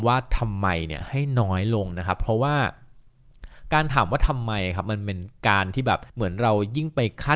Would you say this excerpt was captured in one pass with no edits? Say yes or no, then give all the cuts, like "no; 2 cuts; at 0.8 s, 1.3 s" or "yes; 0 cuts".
no; 1 cut; at 6.1 s